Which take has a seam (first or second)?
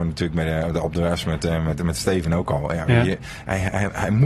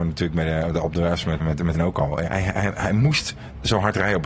second